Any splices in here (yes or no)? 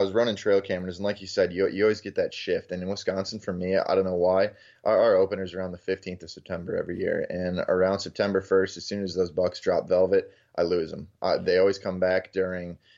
no